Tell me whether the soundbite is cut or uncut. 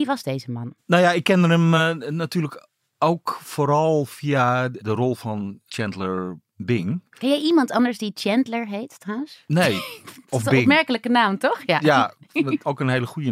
uncut